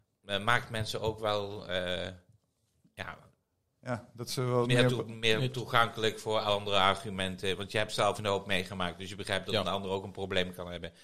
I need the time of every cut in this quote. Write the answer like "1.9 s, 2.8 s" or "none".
8.2 s